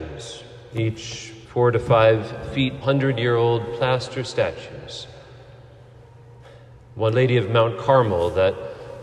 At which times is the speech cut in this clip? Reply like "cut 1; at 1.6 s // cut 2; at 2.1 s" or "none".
cut 1; at 1.4 s // cut 2; at 2.8 s // cut 3; at 7.1 s